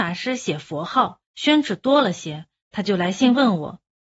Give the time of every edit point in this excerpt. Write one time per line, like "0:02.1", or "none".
0:01.2